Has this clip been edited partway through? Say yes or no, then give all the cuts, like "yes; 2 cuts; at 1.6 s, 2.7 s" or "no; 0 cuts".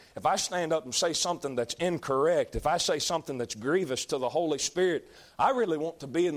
no; 0 cuts